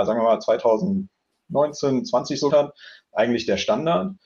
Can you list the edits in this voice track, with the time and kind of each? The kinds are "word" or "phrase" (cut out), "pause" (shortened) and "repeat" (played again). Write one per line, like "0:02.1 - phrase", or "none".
0:02.5 - word